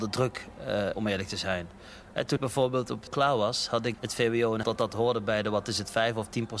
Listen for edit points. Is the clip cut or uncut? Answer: cut